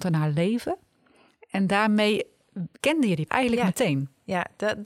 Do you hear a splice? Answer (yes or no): yes